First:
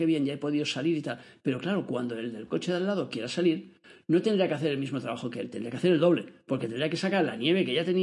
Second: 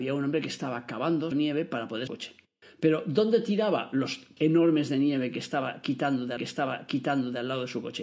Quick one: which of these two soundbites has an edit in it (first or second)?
second